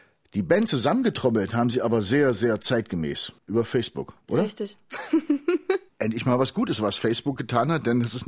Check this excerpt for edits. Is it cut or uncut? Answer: cut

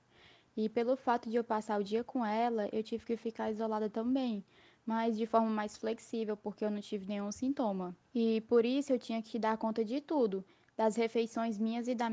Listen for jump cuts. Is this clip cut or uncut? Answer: cut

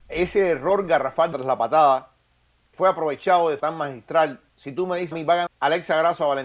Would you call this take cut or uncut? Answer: cut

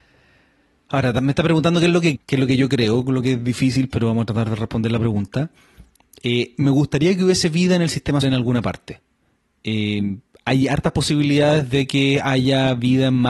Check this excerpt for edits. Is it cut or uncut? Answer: cut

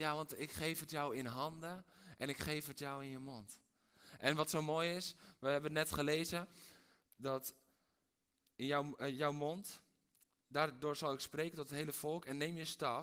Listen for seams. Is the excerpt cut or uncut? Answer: uncut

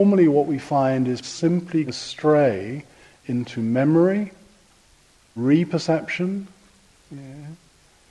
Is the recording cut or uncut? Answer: cut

